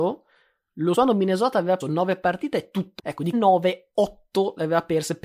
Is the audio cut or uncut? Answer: cut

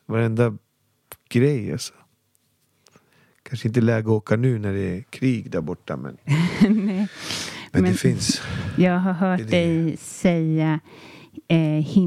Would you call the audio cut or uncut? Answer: uncut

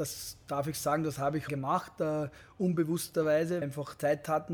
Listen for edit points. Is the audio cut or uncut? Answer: cut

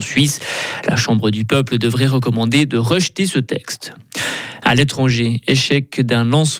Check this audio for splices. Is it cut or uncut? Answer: uncut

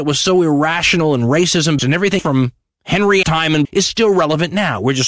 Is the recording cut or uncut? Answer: cut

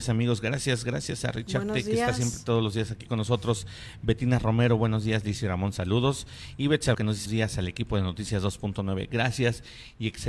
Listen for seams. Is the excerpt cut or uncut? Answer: cut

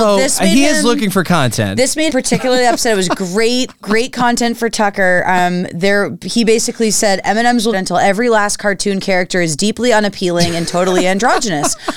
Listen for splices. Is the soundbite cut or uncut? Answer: cut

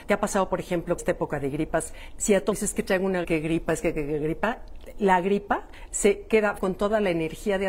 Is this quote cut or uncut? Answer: cut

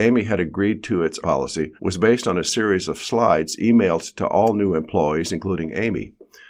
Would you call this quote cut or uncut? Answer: cut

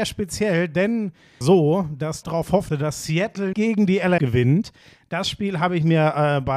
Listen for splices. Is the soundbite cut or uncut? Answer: cut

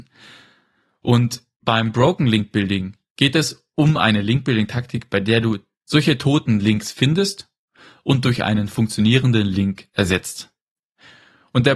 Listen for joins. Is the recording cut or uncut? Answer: uncut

